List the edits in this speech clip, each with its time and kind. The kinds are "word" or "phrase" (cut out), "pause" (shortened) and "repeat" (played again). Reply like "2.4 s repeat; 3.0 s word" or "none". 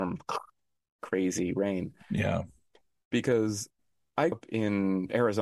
4.3 s word